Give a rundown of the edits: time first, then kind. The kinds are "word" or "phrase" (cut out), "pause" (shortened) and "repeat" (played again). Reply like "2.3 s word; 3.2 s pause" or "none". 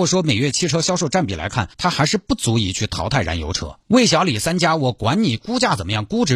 1.7 s pause; 3.8 s pause